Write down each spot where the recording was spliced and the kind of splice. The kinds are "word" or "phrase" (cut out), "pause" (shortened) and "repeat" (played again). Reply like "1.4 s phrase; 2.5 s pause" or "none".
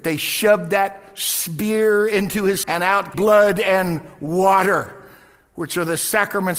2.6 s word; 3.1 s word

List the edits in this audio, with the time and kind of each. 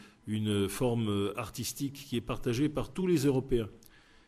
none

